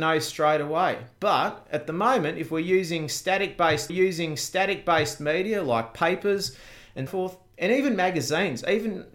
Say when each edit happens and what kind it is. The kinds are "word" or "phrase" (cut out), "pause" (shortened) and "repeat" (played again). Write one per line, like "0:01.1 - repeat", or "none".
0:03.9 - repeat
0:07.1 - word